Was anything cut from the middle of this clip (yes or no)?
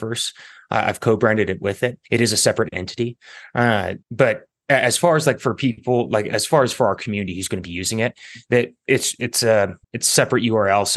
yes